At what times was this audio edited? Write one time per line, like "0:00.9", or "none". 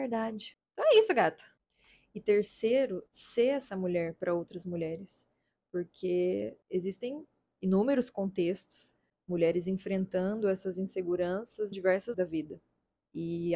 0:03.1
0:11.7
0:12.1

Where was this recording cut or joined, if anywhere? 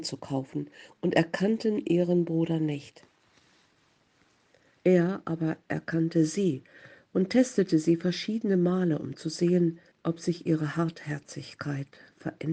0:09.9

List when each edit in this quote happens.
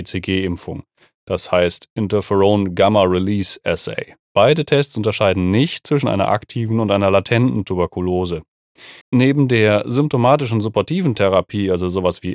0:09.0

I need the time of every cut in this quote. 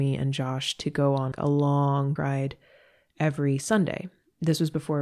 0:01.3
0:02.2

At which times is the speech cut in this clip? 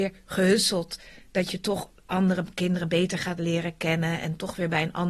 none

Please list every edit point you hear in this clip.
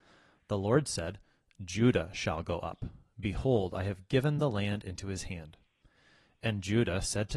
none

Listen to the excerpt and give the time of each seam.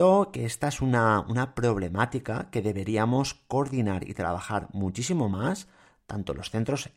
none

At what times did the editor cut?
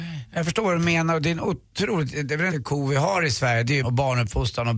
0:01.7
0:02.5
0:03.8

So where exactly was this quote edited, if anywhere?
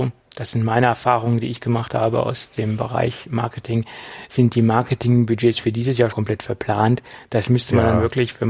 0:06.1

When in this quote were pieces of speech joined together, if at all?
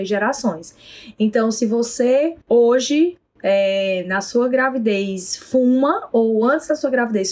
0:02.4

